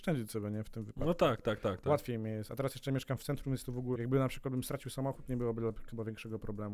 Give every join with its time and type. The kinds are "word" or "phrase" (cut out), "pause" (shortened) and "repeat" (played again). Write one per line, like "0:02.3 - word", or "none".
0:04.0 - word